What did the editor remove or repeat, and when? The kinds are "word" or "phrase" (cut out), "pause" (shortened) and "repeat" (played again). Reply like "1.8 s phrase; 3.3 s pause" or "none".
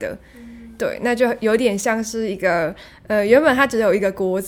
none